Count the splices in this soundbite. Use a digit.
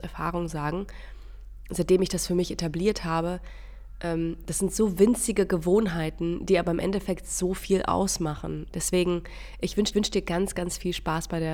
1